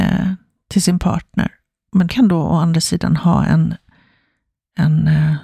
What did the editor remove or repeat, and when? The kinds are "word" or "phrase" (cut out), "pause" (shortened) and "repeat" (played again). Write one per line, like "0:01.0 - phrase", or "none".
0:02.1 - word